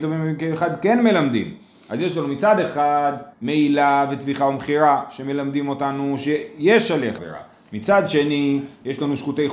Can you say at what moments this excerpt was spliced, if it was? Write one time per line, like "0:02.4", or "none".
0:03.3
0:07.2